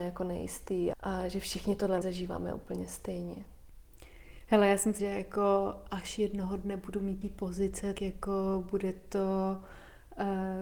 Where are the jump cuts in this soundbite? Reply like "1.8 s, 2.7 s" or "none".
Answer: 0.9 s, 2.0 s, 5.0 s, 7.2 s, 8.0 s